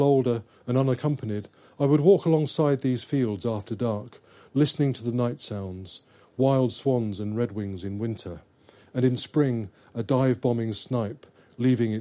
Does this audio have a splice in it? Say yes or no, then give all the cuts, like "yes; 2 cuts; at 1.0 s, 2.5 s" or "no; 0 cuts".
no; 0 cuts